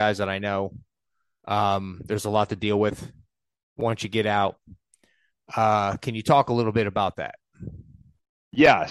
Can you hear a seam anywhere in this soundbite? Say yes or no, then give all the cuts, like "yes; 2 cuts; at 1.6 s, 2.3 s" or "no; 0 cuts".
no; 0 cuts